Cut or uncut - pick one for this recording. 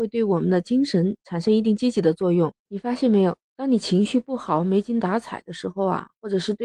cut